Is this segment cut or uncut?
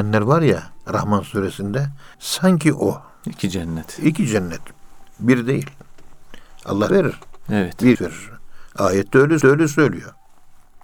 cut